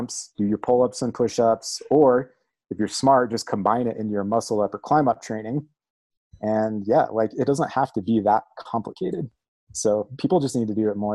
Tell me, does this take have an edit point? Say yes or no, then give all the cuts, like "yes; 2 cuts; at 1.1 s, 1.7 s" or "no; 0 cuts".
no; 0 cuts